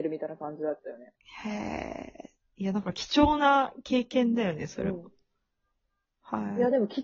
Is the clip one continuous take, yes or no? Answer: no